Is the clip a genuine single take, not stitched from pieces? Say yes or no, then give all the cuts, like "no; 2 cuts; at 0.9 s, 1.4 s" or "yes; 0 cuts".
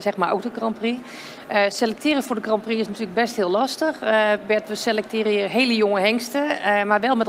yes; 0 cuts